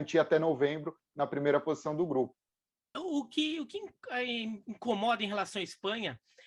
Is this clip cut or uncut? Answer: uncut